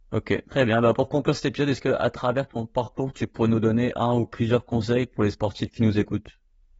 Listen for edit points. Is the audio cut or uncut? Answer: uncut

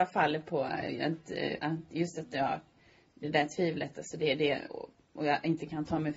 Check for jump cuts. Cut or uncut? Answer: uncut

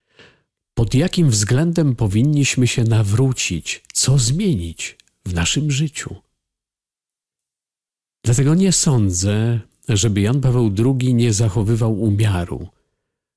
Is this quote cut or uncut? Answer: cut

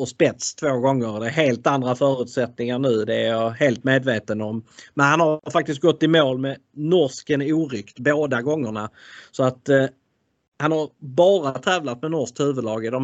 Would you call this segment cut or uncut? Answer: uncut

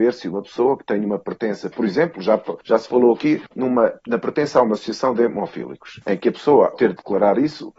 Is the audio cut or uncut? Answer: cut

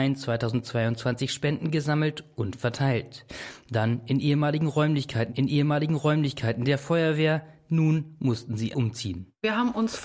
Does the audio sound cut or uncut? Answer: cut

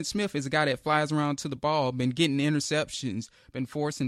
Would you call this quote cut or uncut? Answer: uncut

